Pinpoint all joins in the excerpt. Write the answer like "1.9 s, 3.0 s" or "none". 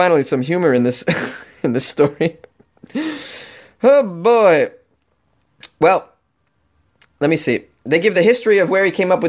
none